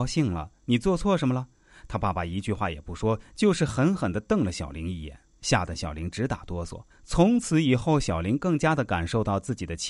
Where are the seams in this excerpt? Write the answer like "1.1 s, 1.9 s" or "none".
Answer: 1.5 s, 6.9 s